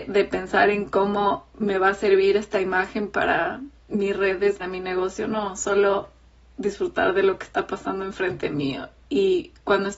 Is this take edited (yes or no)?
yes